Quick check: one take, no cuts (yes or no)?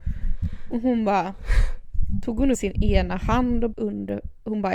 no